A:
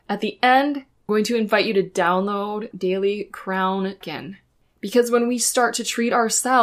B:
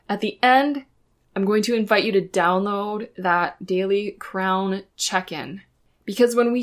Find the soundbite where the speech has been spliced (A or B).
A